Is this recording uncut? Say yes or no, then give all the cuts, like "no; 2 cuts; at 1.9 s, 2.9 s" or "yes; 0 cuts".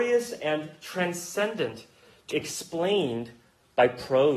no; 1 cut; at 2.3 s